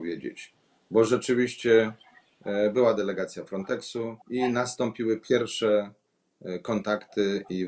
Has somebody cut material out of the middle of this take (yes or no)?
yes